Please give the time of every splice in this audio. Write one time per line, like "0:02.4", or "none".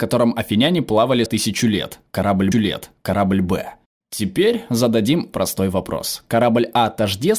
0:01.3
0:02.5
0:05.3